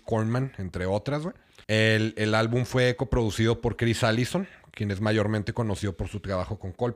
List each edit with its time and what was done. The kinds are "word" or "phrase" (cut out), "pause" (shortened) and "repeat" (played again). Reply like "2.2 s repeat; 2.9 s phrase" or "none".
1.6 s pause